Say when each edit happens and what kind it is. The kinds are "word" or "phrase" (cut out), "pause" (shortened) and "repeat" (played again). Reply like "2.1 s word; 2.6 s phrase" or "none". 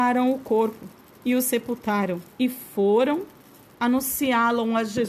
2.3 s pause